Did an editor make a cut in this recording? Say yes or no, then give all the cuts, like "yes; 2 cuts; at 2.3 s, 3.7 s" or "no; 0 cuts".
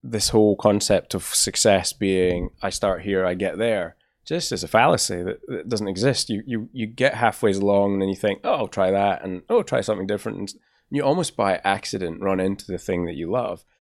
no; 0 cuts